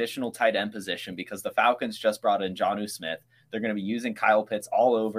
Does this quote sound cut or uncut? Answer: uncut